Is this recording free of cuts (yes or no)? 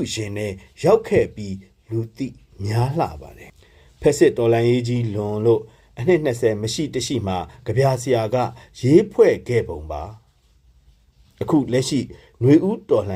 yes